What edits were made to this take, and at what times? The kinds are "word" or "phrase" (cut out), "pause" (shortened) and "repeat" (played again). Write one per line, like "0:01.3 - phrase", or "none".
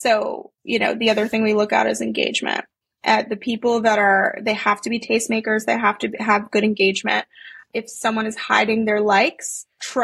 none